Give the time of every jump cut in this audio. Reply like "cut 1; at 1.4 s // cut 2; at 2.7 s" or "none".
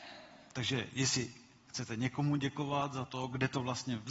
none